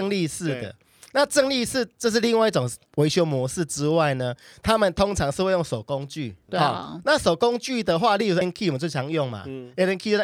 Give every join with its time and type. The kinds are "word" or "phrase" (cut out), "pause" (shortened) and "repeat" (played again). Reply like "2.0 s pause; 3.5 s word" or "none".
2.9 s pause; 6.5 s word; 8.4 s word

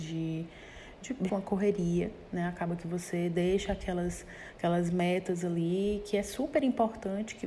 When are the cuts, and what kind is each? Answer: 1.3 s word

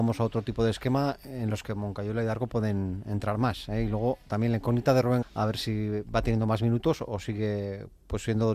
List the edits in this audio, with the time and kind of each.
5.2 s word

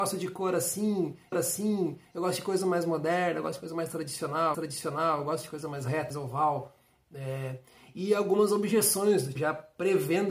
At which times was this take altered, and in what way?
1.3 s repeat; 4.5 s repeat; 6.1 s phrase; 9.4 s word

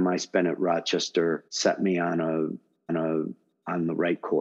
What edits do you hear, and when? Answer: 1.5 s pause; 2.9 s repeat

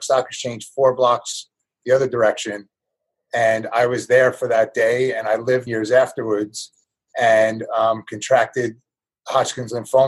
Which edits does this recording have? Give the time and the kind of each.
5.7 s phrase

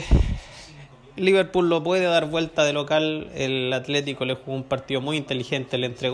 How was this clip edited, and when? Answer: none

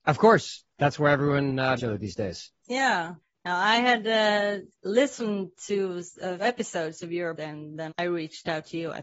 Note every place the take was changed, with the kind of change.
1.8 s word; 3.2 s pause; 4.7 s pause; 6.4 s word; 7.4 s word; 7.9 s word

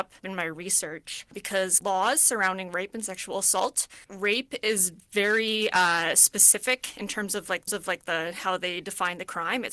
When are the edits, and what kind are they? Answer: 1.8 s word; 4.0 s pause; 7.7 s repeat

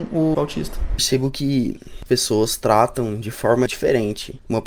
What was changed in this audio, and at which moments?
2.1 s word

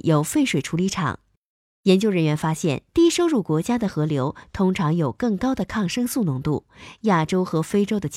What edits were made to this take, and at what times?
2.9 s pause

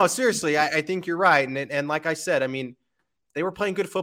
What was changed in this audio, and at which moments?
none

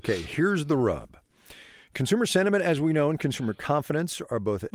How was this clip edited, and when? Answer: none

